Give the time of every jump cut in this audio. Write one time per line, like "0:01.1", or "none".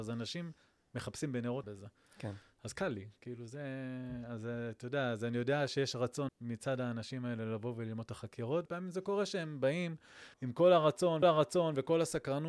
0:01.6
0:06.3
0:08.7
0:10.3
0:11.2